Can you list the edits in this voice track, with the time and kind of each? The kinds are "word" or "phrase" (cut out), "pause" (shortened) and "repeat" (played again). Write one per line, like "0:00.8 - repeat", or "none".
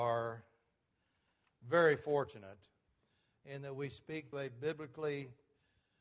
0:04.3 - word